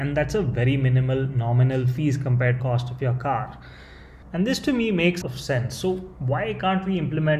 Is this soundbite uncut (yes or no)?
no